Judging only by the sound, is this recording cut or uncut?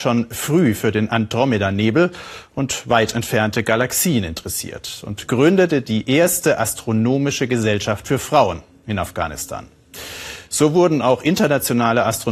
uncut